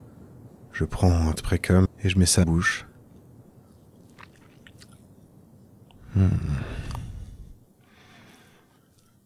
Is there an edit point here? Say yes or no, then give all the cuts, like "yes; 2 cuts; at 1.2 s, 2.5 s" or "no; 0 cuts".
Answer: yes; 3 cuts; at 1.4 s, 1.9 s, 2.4 s